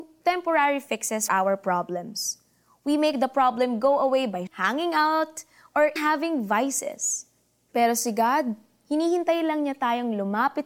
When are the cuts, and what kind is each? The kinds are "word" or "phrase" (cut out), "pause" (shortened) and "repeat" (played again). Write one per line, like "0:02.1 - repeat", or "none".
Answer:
0:01.3 - word
0:04.5 - word
0:06.0 - word